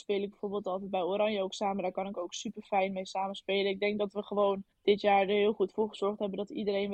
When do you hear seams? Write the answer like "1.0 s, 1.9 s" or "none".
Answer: 4.7 s